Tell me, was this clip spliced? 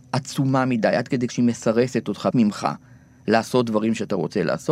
yes; 2 cuts; at 1.3 s, 2.3 s

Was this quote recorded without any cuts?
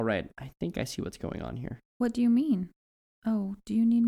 no; 1 cut; at 1.9 s

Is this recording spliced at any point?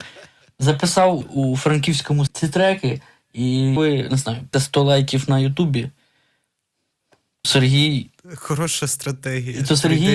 yes; 5 cuts; at 1.2 s, 2.3 s, 3.8 s, 4.5 s, 7.4 s

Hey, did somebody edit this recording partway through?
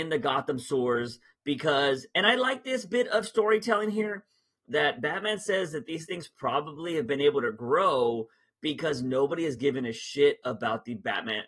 no; 0 cuts

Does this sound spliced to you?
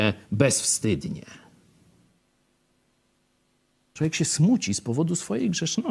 no; 0 cuts

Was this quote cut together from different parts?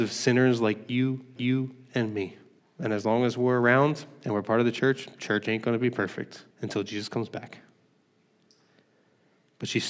yes; 3 cuts; at 1.4 s, 2.6 s, 6.5 s

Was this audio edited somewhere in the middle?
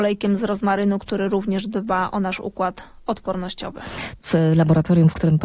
no; 0 cuts

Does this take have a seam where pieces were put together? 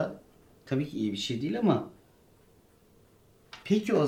no; 0 cuts

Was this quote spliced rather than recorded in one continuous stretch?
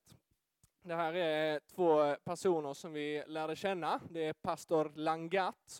no; 0 cuts

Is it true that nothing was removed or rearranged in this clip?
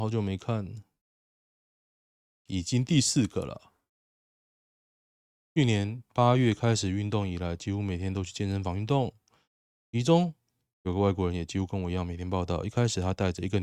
yes; 0 cuts

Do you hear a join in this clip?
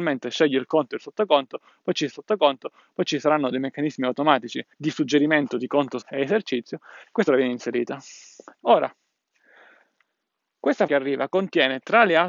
yes; 6 cuts; at 2.1 s, 4.7 s, 6.0 s, 7.3 s, 8.5 s, 10.9 s

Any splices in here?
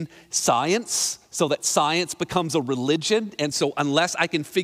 no; 0 cuts

